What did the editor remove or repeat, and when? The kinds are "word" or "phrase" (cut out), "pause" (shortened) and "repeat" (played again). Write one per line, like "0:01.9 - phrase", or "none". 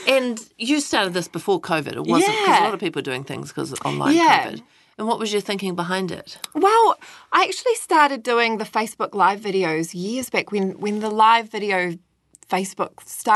none